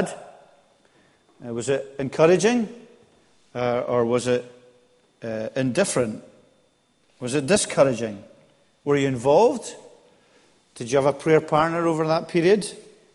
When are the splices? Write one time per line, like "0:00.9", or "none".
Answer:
none